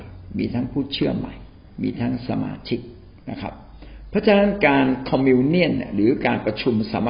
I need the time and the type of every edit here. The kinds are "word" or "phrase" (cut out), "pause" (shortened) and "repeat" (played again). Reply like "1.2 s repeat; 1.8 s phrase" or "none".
3.2 s pause

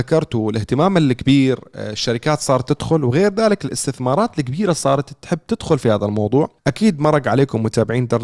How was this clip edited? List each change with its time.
6.6 s pause

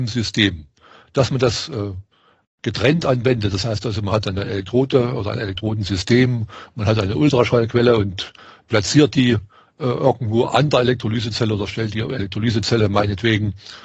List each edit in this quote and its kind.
none

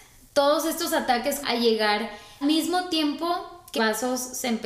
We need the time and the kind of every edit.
1.4 s word; 2.4 s word; 3.8 s word

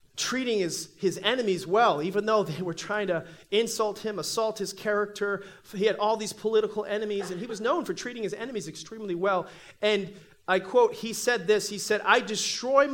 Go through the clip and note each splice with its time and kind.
none

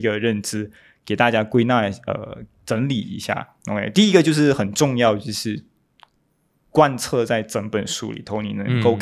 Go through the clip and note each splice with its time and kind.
none

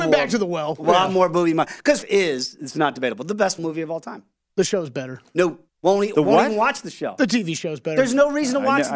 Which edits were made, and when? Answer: 2.0 s phrase; 3.6 s word; 5.7 s pause

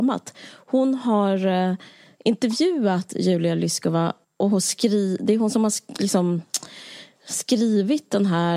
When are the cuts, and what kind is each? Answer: 4.2 s pause

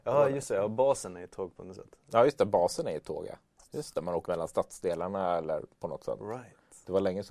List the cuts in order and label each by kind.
4.3 s word

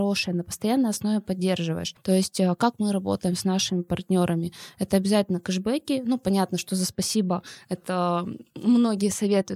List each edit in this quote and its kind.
none

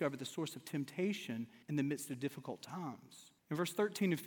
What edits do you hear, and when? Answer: 1.6 s pause; 3.4 s pause

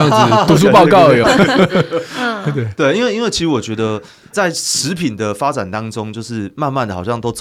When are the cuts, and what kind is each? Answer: 1.2 s word

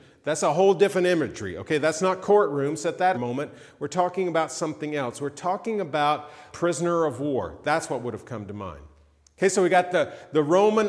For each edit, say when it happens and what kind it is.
3.1 s phrase; 6.5 s word

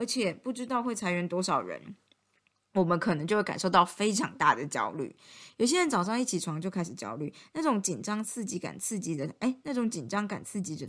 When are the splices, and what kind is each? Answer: none

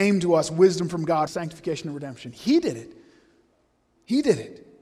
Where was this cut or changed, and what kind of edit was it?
1.3 s word

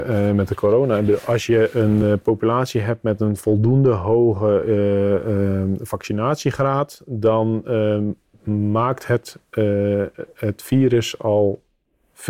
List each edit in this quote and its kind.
none

